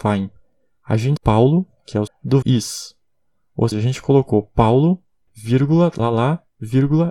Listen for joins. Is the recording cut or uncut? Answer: cut